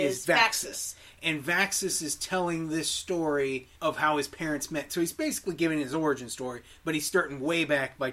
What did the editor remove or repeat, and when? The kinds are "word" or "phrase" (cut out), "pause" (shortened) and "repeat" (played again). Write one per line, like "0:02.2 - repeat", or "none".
0:03.7 - pause